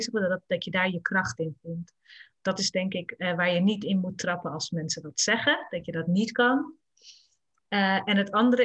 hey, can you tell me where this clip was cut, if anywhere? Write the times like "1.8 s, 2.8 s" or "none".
none